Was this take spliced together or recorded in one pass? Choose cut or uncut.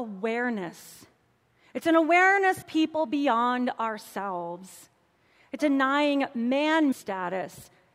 cut